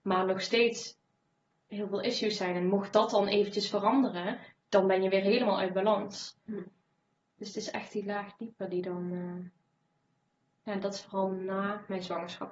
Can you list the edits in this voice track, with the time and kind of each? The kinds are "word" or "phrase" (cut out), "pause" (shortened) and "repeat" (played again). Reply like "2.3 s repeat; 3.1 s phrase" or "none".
none